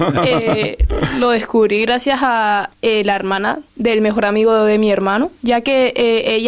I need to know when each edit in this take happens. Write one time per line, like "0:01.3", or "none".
0:02.7
0:03.7
0:05.4